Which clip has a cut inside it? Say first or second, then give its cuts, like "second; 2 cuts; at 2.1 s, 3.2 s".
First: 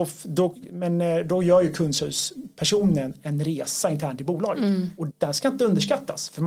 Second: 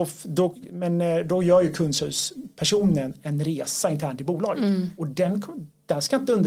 first; 1 cut; at 5.1 s